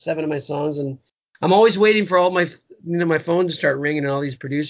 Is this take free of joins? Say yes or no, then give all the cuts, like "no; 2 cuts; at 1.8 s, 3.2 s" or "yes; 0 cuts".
yes; 0 cuts